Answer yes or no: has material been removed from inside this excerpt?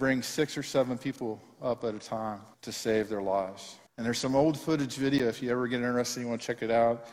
yes